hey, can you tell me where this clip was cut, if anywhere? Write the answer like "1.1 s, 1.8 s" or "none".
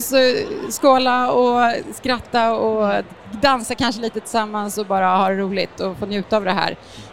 none

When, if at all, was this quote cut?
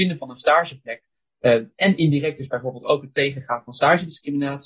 none

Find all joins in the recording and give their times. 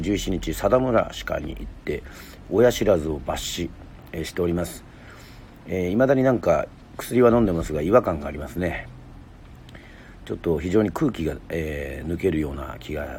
6.9 s

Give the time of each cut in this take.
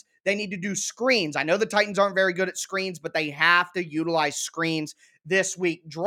none

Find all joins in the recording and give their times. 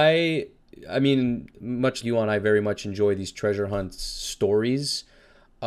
2.0 s

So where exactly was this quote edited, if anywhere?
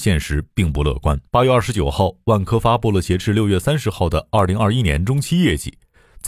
1.3 s

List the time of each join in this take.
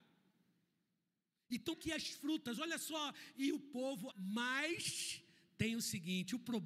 1.7 s, 4.1 s

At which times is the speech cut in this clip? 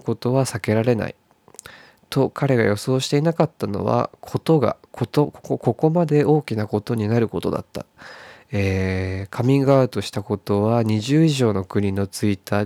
none

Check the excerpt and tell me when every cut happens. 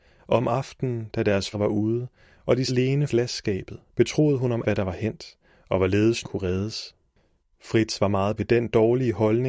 1.5 s, 2.7 s, 3.1 s, 4.6 s, 6.2 s, 8.4 s

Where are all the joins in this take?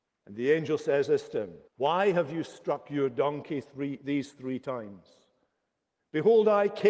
1.7 s

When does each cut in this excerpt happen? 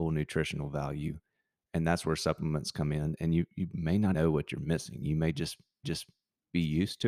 4.1 s, 5.8 s

